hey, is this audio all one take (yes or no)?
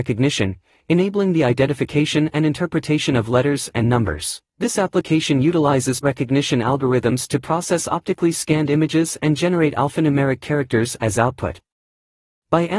no